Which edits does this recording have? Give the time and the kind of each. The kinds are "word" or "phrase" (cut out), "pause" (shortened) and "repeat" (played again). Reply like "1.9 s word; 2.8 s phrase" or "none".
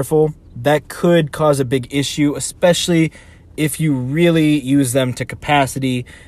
none